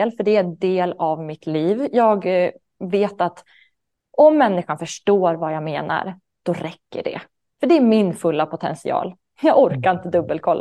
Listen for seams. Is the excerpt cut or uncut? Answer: uncut